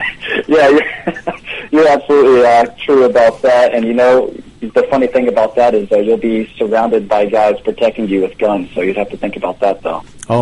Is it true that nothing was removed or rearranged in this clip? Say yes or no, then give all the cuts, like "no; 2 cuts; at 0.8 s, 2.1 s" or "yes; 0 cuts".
no; 1 cut; at 4.7 s